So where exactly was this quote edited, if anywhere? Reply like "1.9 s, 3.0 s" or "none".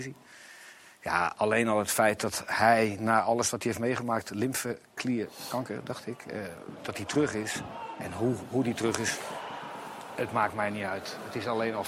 none